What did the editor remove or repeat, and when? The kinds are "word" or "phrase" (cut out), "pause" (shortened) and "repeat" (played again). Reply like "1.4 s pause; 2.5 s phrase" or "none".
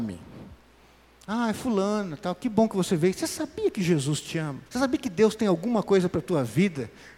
4.7 s pause

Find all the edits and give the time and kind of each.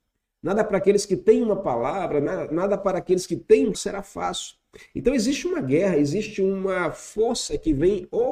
3.7 s word

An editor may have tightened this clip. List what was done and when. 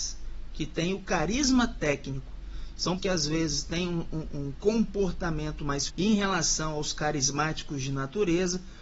3.0 s word; 4.3 s word; 5.9 s word

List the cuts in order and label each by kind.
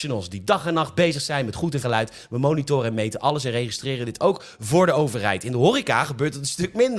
1.8 s word

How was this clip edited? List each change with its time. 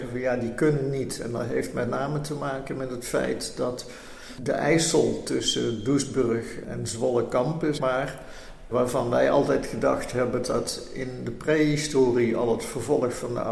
7.8 s word; 10.4 s word

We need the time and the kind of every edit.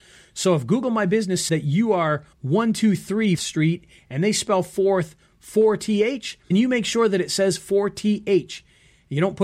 1.5 s word; 2.3 s pause; 3.3 s word; 6.5 s word

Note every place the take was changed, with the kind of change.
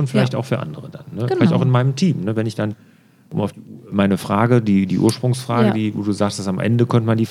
none

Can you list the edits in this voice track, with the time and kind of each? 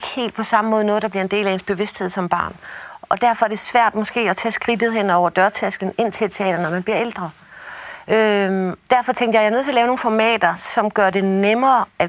8.8 s pause

